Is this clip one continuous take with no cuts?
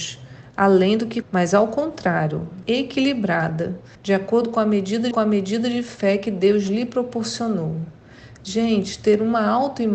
no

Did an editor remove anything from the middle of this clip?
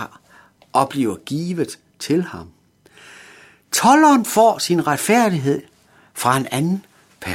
no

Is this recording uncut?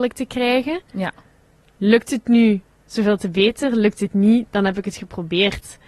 yes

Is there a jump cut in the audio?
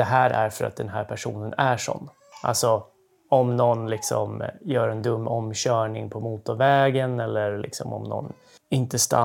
no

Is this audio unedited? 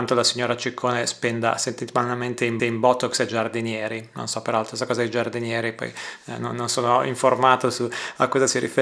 no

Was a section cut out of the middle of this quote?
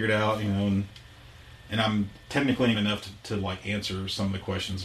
yes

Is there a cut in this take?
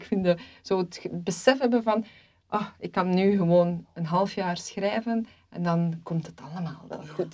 no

